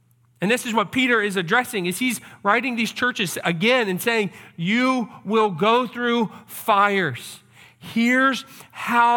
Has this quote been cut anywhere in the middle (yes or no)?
no